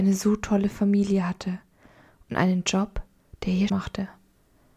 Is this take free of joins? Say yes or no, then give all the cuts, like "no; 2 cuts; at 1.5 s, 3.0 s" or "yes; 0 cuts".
no; 1 cut; at 3.7 s